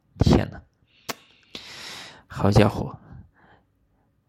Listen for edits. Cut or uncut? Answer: uncut